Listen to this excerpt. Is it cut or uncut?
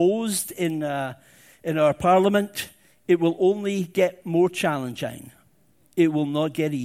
uncut